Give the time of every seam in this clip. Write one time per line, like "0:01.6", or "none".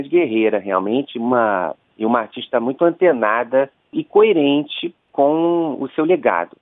none